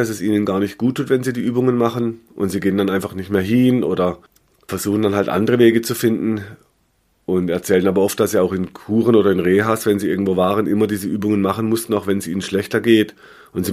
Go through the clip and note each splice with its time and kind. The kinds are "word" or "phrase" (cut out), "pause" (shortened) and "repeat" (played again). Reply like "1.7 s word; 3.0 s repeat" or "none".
none